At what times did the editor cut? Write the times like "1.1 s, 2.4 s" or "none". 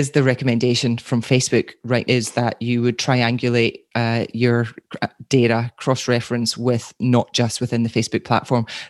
2.0 s